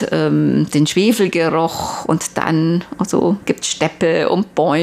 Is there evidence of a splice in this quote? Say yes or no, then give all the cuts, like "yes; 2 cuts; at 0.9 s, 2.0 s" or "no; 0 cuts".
no; 0 cuts